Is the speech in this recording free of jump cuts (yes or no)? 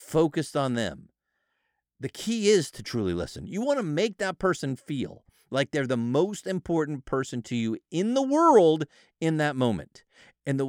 yes